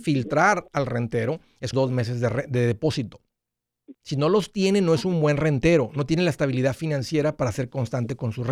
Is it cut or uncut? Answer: cut